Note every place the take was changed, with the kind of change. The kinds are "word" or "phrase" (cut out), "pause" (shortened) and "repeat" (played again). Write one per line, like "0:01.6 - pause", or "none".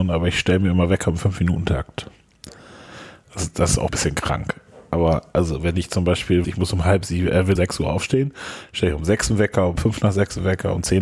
0:03.9 - phrase
0:06.4 - word
0:07.6 - word